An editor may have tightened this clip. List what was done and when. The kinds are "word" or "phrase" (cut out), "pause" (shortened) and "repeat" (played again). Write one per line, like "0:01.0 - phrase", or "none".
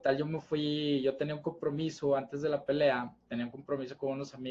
none